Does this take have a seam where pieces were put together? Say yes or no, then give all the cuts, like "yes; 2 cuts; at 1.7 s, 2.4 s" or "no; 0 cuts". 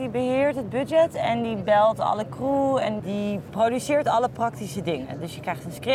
yes; 1 cut; at 3.0 s